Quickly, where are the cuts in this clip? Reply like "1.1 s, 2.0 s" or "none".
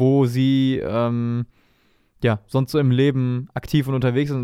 none